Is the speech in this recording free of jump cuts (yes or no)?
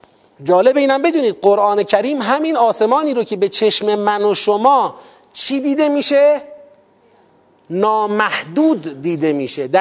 yes